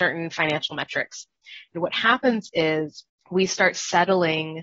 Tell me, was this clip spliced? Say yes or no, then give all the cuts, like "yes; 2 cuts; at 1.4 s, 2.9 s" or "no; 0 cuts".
yes; 2 cuts; at 1.7 s, 3.1 s